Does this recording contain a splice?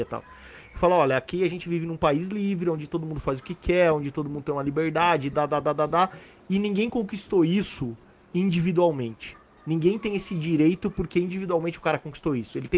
no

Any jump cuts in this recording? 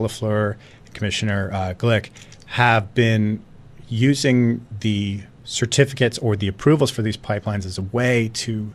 no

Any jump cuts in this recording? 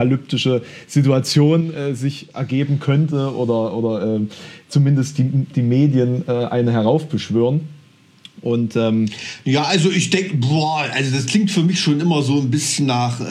no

